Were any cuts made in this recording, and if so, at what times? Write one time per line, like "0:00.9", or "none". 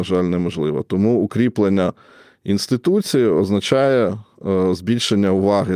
none